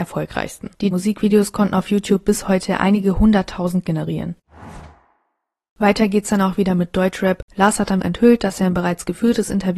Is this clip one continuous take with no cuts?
no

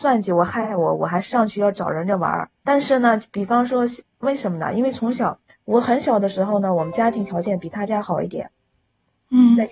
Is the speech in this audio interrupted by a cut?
yes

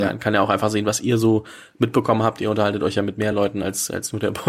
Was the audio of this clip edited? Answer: no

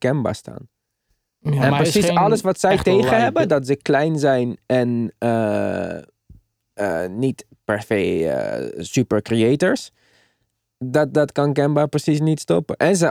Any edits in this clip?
no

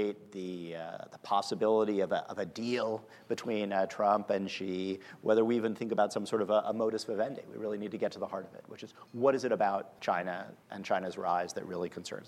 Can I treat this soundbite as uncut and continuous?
no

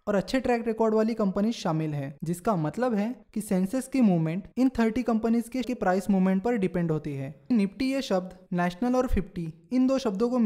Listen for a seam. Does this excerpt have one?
yes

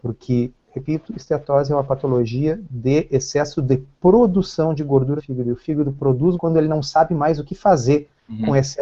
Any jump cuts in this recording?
yes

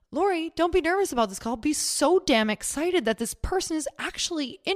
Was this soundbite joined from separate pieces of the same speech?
no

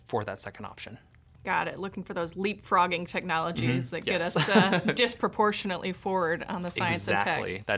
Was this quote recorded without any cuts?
yes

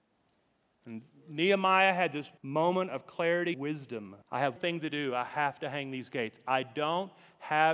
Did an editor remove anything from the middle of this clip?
yes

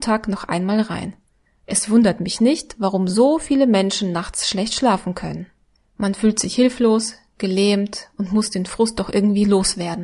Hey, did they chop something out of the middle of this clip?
no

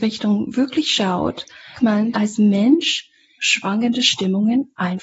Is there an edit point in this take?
yes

